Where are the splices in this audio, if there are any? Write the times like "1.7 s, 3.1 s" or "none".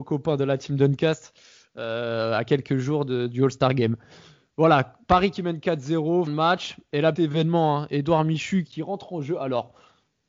6.3 s, 7.1 s, 8.7 s